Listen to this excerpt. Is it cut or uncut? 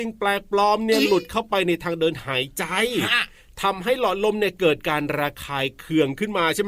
uncut